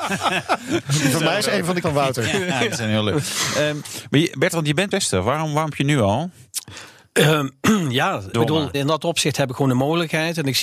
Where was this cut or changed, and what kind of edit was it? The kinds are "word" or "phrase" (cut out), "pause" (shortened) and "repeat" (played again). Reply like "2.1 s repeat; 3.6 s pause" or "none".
1.4 s word; 1.8 s word; 4.9 s word; 5.7 s word; 8.3 s word; 8.7 s word